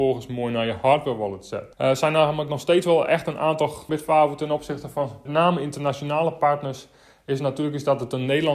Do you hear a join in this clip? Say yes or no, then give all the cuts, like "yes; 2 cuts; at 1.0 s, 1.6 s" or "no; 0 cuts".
yes; 3 cuts; at 1.7 s, 3.9 s, 5.3 s